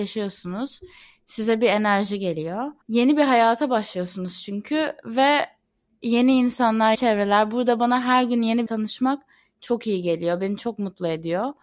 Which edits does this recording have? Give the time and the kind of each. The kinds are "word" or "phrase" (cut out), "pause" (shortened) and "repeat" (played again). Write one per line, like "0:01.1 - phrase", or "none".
0:02.8 - pause
0:06.9 - word
0:08.7 - word